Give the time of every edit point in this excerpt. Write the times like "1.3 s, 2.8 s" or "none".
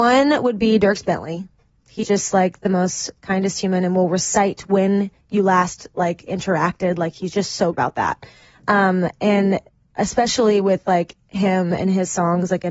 2.0 s, 7.7 s

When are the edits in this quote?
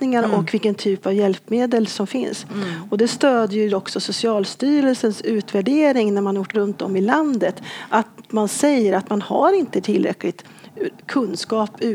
6.5 s

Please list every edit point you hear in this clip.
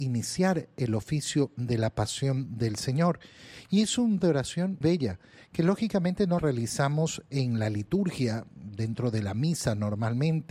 4.2 s, 4.8 s, 6.4 s

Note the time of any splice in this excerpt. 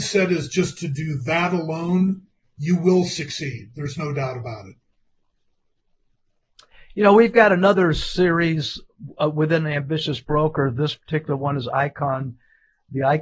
none

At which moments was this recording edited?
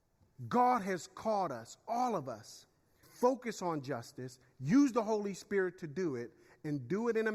3.0 s

